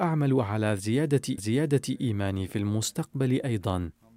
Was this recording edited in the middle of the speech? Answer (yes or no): yes